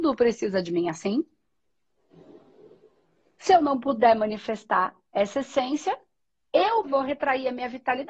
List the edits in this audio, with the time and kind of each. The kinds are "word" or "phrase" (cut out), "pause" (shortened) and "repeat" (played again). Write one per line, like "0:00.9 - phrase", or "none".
0:06.8 - word